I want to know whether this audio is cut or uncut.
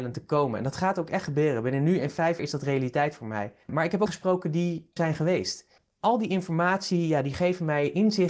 cut